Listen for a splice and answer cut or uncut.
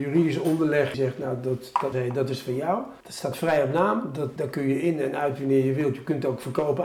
cut